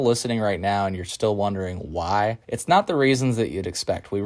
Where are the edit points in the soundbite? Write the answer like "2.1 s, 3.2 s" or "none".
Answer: 2.4 s